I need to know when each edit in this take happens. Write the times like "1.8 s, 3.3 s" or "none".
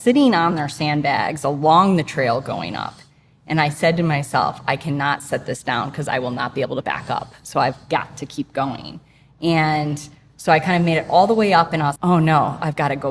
6.8 s, 12.0 s